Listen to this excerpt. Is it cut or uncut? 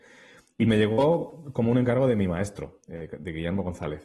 uncut